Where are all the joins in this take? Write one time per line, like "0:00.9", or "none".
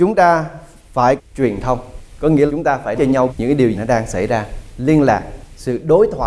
0:01.2
0:02.5
0:03.0
0:03.3
0:03.7